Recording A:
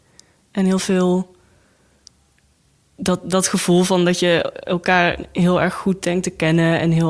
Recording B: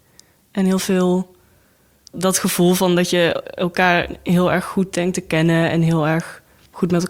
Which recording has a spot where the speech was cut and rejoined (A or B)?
B